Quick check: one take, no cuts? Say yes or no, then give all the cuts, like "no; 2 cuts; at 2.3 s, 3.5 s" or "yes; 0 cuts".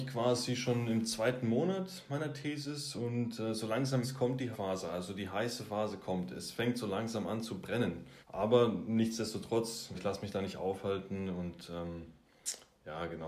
no; 4 cuts; at 4.0 s, 4.5 s, 8.2 s, 9.9 s